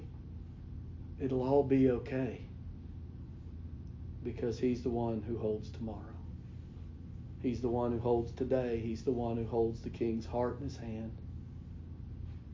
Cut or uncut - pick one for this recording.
uncut